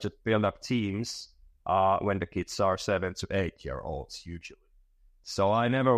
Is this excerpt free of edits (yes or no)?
yes